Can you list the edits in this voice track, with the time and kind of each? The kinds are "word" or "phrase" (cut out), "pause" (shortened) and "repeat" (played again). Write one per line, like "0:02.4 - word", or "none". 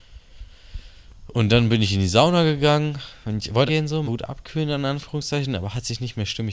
0:03.7 - phrase
0:04.0 - word